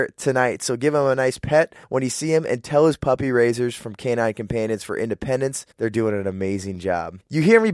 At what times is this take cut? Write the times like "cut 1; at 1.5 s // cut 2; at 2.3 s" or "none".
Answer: cut 1; at 1.8 s // cut 2; at 5.7 s

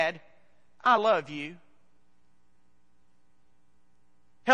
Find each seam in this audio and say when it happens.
none

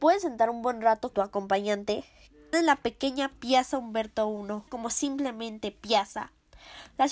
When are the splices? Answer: cut 1; at 1.1 s // cut 2; at 2.5 s // cut 3; at 4.7 s

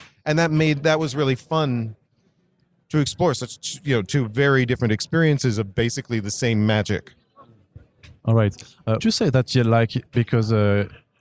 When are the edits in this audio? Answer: cut 1; at 9.0 s

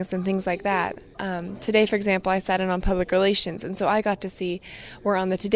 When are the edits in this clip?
none

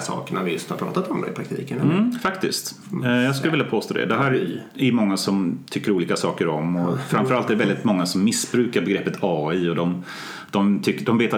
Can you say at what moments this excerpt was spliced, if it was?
none

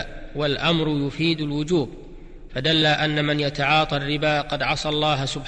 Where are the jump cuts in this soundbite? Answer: cut 1; at 2.8 s

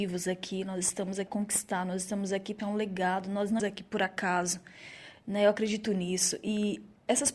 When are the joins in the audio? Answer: cut 1; at 1.3 s // cut 2; at 2.6 s // cut 3; at 3.6 s // cut 4; at 5.9 s

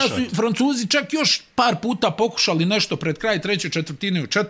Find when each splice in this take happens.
none

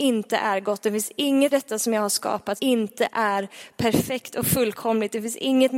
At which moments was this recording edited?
cut 1; at 1.5 s // cut 2; at 2.6 s

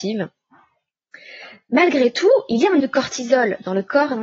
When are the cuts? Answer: cut 1; at 2.8 s

